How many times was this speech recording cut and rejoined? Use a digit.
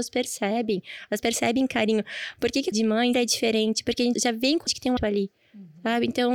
6